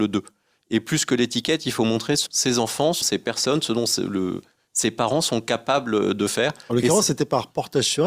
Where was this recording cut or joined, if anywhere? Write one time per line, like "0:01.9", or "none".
0:02.3
0:03.0